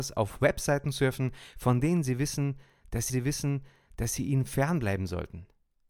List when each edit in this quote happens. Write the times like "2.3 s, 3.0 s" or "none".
3.1 s